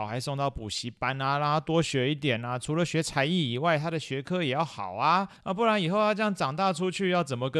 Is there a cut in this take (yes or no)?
yes